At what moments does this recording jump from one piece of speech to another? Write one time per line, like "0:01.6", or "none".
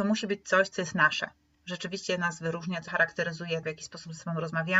0:01.5
0:02.9
0:03.6